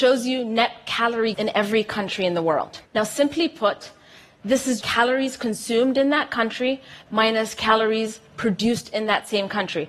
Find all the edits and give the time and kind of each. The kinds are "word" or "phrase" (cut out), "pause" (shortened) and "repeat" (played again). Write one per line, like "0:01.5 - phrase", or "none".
0:01.3 - word
0:02.9 - pause
0:04.8 - word